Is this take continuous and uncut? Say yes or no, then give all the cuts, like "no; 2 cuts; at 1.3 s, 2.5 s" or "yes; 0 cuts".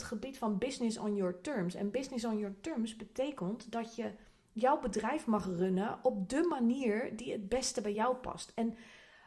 yes; 0 cuts